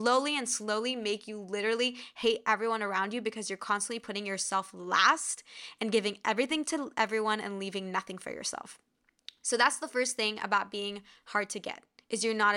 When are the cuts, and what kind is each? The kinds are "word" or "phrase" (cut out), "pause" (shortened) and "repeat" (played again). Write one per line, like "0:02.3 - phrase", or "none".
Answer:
none